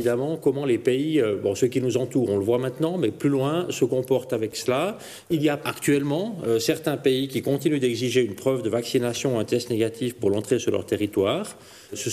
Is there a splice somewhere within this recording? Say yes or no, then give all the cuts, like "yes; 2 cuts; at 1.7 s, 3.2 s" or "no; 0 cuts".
no; 0 cuts